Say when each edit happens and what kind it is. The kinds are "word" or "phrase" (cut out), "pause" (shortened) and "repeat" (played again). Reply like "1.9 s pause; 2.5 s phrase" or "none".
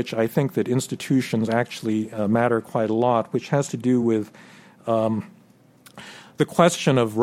none

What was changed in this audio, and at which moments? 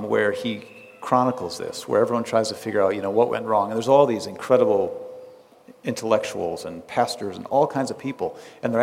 none

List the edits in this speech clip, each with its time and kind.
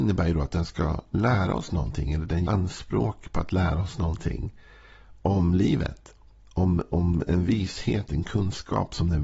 2.5 s word

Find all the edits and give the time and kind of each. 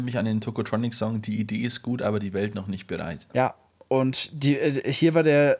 3.3 s pause

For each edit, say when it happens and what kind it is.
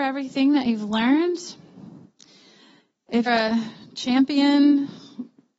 3.3 s word

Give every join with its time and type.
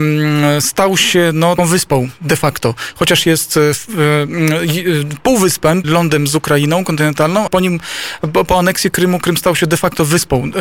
1.6 s word; 5.8 s word; 7.5 s word

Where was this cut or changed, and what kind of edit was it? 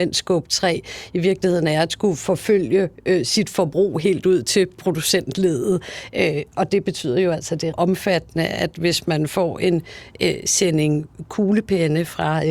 7.7 s word

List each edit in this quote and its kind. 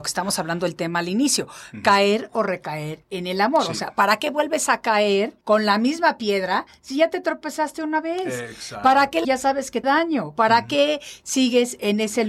5.4 s pause; 9.2 s phrase; 9.8 s phrase

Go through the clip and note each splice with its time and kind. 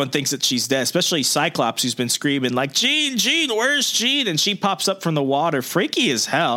none

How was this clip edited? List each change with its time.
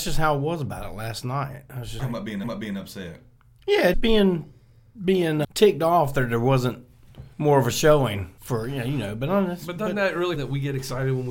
2.0 s word; 2.4 s repeat; 3.9 s word; 5.4 s word; 7.3 s pause; 8.4 s pause; 10.4 s phrase

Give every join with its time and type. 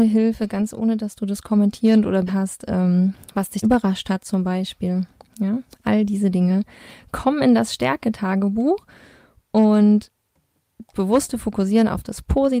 2.3 s word; 3.6 s word; 10.9 s word

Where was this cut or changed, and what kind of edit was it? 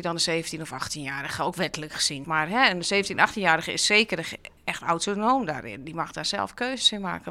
2.2 s word; 4.6 s pause

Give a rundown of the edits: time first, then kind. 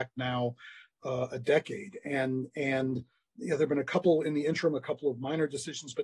none

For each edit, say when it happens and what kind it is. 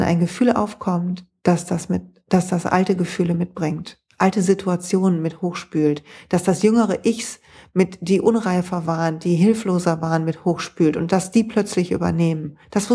none

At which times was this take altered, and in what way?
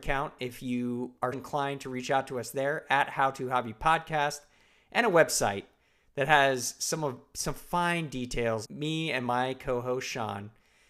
1.3 s word; 8.6 s word

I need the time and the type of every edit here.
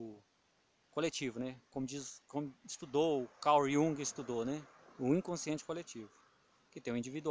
none

